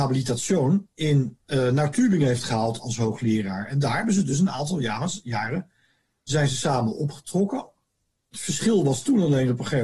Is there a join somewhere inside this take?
no; 0 cuts

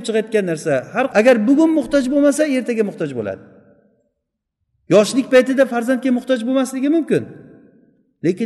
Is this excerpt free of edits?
no; 1 cut; at 1.1 s

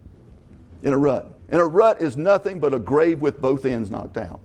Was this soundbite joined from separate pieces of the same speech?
yes; 1 cut; at 1.4 s

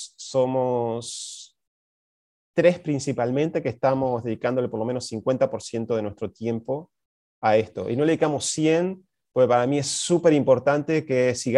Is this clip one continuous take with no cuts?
yes; 0 cuts

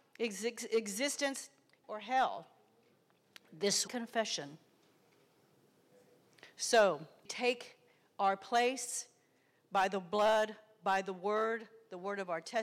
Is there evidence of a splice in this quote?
yes; 3 cuts; at 1.8 s, 3.9 s, 7.3 s

